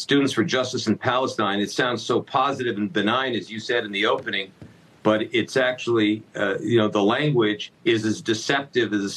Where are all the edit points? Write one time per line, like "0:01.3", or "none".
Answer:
0:07.8